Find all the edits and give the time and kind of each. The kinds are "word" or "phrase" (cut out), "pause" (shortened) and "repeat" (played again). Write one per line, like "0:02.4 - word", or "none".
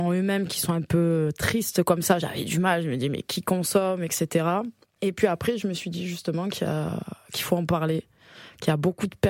0:04.9 - pause